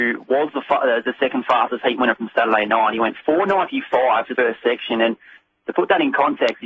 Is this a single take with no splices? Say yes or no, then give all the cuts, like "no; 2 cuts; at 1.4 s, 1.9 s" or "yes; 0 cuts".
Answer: no; 1 cut; at 4.4 s